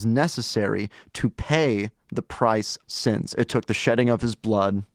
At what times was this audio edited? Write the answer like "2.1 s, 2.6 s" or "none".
2.8 s